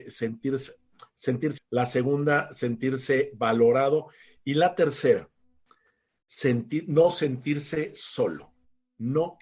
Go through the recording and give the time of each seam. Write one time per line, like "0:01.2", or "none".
0:01.6

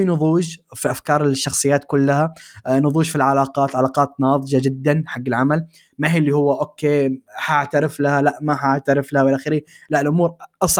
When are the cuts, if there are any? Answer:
none

